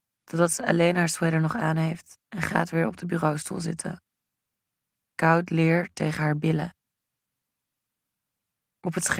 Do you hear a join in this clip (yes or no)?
yes